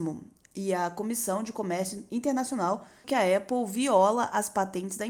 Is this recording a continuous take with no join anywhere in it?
no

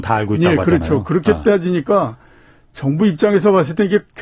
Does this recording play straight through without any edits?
yes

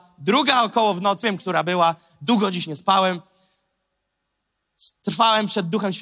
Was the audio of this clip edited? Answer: yes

